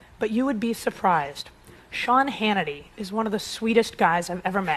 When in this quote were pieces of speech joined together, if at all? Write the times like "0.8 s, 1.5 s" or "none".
none